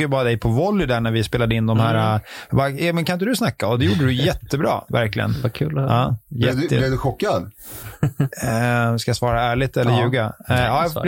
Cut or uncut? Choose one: uncut